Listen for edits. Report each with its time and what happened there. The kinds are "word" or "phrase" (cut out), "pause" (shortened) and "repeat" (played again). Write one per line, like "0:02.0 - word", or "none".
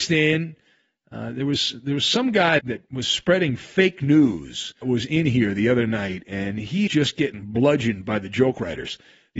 0:02.6 - word
0:04.8 - word
0:06.9 - word